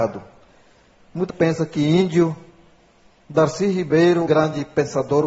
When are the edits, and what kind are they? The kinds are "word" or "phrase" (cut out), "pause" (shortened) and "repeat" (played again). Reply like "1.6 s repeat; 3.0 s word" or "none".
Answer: 1.3 s word; 4.3 s word